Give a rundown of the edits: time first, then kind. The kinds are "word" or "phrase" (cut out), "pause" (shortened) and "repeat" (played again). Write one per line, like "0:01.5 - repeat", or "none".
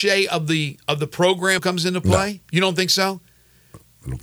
0:01.6 - word
0:02.4 - pause